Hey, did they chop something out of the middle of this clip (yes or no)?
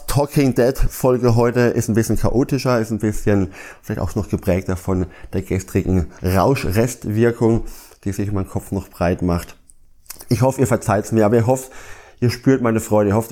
no